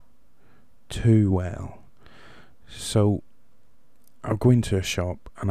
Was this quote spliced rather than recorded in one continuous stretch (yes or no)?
no